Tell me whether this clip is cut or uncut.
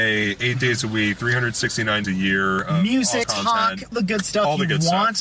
cut